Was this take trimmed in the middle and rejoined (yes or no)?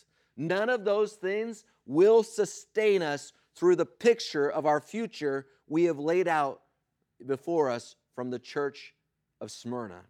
no